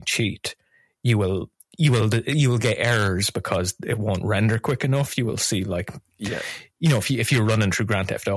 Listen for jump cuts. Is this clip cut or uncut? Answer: uncut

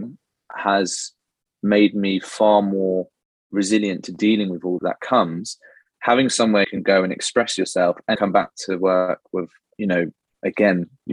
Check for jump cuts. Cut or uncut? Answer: cut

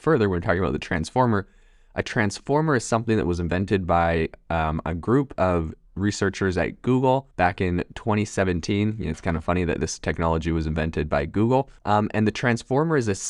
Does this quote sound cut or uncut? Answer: cut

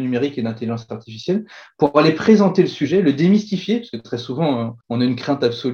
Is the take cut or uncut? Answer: cut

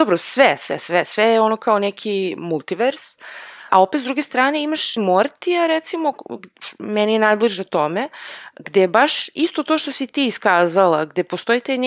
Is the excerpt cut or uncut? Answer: cut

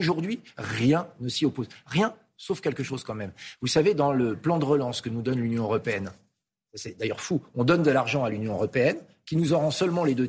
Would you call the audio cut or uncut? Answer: uncut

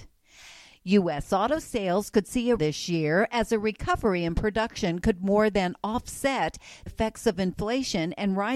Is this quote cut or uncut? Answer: cut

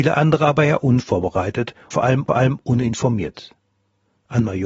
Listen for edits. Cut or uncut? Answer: cut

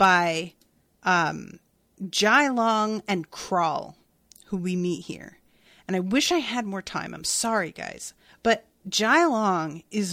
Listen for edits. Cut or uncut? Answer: cut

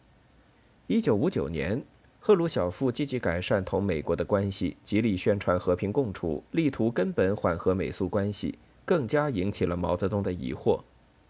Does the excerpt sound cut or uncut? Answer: cut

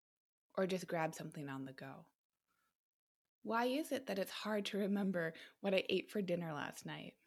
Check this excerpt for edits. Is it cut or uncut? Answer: uncut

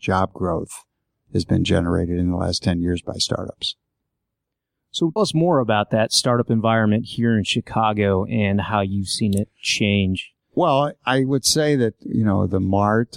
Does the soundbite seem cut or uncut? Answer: cut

